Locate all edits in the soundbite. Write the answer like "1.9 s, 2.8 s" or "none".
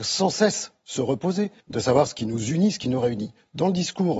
1.6 s

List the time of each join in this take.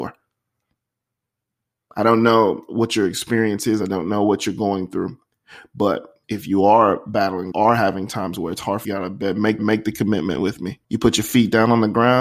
6.2 s, 7.5 s, 8.8 s, 9.6 s, 10.8 s

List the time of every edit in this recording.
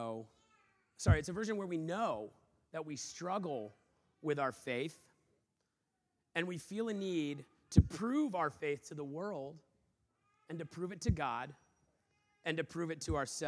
none

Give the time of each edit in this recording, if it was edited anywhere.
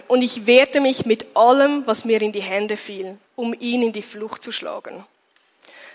3.3 s

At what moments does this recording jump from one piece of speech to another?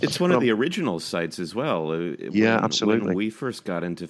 none

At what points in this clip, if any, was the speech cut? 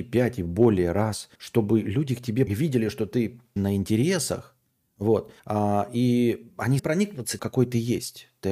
1.3 s, 2.5 s, 3.6 s, 5.4 s, 6.8 s, 7.4 s

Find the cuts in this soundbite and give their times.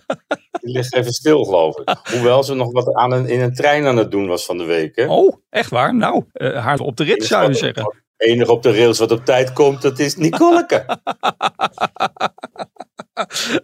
6.3 s, 6.8 s, 8.1 s

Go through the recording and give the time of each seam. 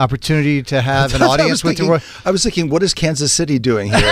none

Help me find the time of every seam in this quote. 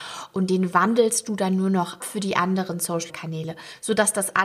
2.0 s, 3.1 s

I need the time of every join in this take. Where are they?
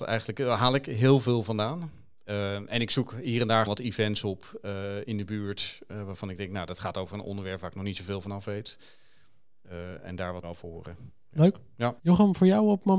3.7 s, 10.4 s, 12.0 s

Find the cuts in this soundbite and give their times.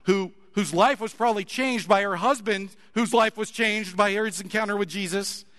none

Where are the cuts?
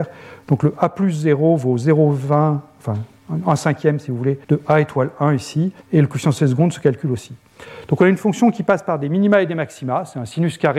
4.4 s, 5.8 s

